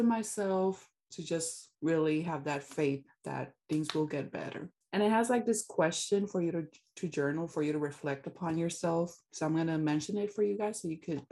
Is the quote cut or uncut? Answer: uncut